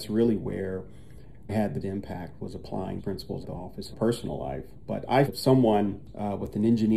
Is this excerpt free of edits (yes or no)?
no